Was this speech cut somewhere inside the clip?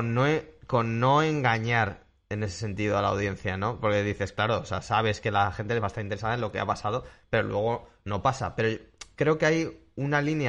no; 0 cuts

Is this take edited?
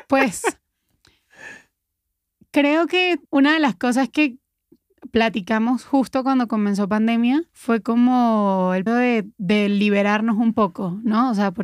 yes; 4 cuts; at 3.3 s, 7.5 s, 8.9 s, 9.3 s

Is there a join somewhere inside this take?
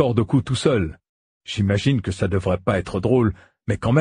no; 0 cuts

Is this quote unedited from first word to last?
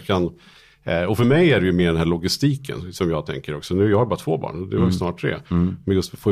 yes; 0 cuts

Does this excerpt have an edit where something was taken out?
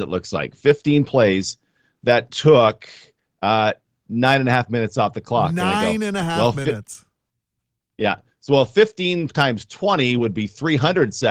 no; 0 cuts

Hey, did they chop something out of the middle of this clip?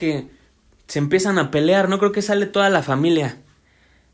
no; 0 cuts

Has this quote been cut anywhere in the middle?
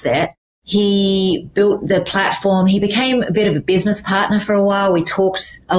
no; 0 cuts

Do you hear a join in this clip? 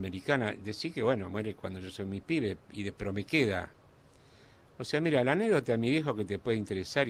no; 0 cuts

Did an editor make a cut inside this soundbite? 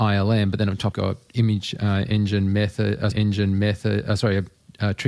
yes; 2 cuts; at 0.9 s, 3.1 s

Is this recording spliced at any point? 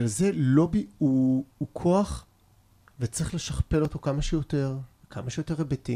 yes; 1 cut; at 1.5 s

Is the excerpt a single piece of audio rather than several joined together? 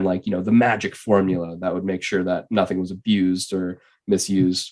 yes; 0 cuts

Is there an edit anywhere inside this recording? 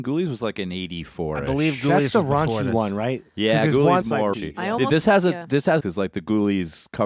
yes; 3 cuts; at 4.0 s, 4.3 s, 5.8 s

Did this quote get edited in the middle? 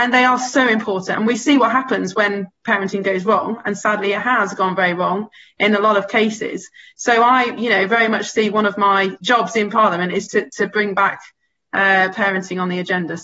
no; 0 cuts

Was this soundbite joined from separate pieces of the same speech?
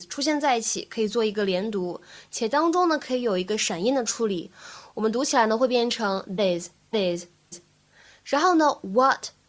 yes; 3 cuts; at 6.4 s, 6.9 s, 7.5 s

